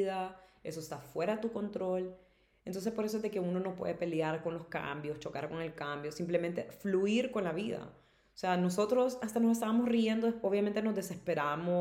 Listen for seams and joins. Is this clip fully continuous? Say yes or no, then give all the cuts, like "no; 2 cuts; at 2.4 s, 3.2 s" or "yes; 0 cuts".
yes; 0 cuts